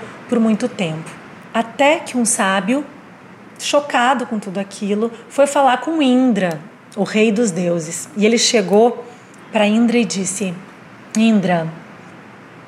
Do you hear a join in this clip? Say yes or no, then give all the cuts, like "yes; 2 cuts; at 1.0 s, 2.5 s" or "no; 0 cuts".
no; 0 cuts